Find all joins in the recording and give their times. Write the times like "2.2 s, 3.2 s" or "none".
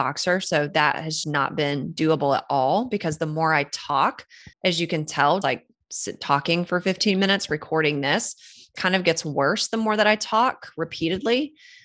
1.2 s, 4.5 s, 5.4 s, 8.8 s